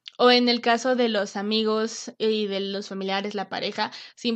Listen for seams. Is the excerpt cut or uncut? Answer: uncut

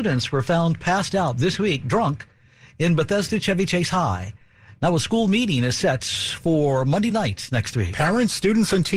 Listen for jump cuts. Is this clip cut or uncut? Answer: uncut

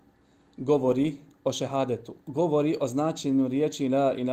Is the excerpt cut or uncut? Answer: cut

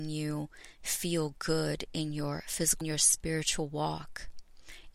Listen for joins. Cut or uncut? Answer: cut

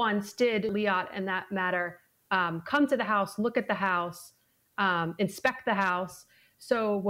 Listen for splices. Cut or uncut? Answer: uncut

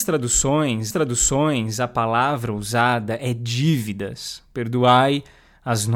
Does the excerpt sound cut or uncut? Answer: cut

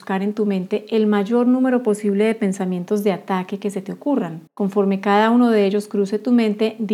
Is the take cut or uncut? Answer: cut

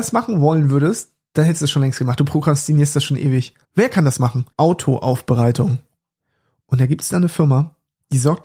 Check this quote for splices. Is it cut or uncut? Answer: cut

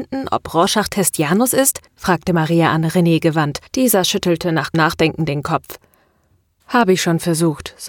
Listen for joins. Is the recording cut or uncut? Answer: cut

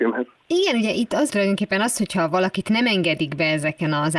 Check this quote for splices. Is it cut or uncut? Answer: cut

